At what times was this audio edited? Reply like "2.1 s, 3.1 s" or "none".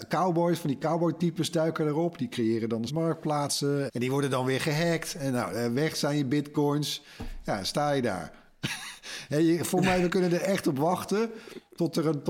2.9 s, 3.9 s